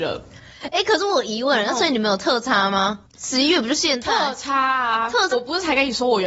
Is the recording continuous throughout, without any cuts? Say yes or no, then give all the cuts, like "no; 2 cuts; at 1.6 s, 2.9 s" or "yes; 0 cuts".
no; 2 cuts; at 3.1 s, 5.3 s